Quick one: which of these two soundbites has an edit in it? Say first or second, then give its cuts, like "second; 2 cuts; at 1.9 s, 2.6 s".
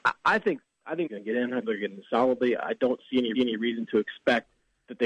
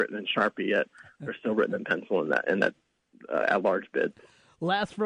first; 3 cuts; at 1.1 s, 1.6 s, 3.3 s